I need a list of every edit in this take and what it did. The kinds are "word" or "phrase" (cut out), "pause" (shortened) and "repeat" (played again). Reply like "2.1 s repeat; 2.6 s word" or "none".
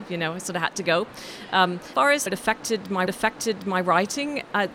1.9 s word; 2.3 s word; 3.1 s repeat